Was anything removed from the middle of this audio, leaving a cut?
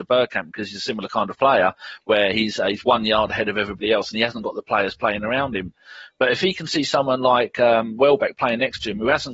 no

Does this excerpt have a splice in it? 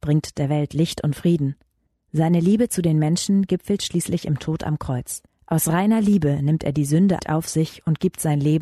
yes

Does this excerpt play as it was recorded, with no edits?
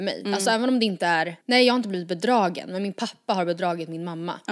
no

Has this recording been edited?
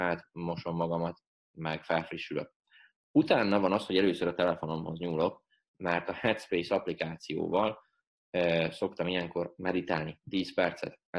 no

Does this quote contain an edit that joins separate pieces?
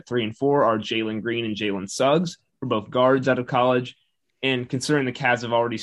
no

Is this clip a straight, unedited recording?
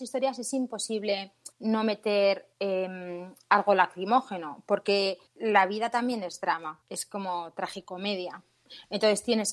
no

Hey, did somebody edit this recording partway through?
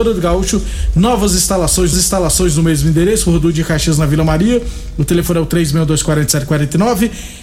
yes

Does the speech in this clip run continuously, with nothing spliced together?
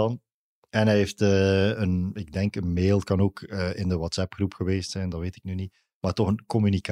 yes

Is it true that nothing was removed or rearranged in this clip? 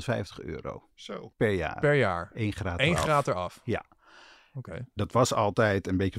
yes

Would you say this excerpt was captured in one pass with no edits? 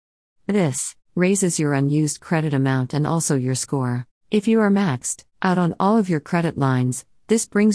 no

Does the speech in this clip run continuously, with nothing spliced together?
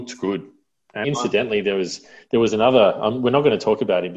no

